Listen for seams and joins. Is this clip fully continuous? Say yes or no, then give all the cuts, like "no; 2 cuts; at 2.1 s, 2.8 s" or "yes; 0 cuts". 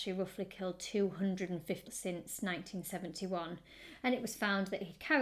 no; 1 cut; at 1.8 s